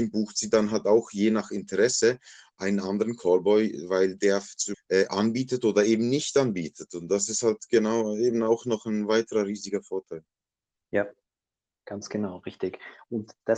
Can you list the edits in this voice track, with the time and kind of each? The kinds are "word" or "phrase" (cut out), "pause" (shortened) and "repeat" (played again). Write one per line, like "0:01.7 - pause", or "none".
0:04.7 - phrase